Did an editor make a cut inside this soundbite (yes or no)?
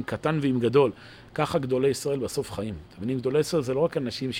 no